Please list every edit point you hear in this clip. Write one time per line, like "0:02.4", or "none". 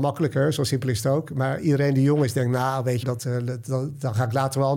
0:03.0

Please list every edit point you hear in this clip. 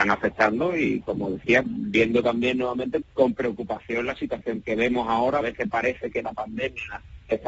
0:01.6
0:03.0
0:04.6
0:05.4

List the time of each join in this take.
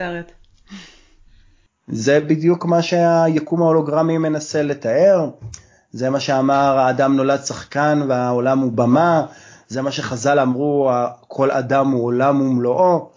none

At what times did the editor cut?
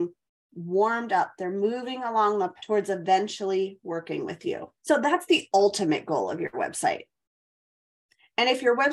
0:02.6
0:04.8

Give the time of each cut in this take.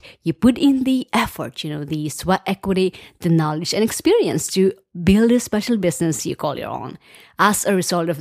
none

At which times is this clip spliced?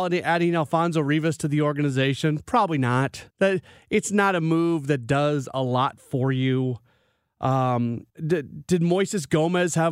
0:03.3
0:08.1

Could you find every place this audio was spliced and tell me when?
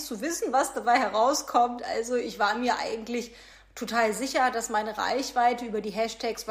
none

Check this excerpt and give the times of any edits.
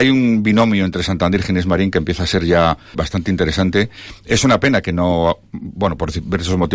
0:02.9

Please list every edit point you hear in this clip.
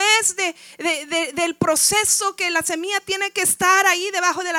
none

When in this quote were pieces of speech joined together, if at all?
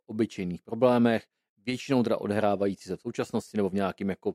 none

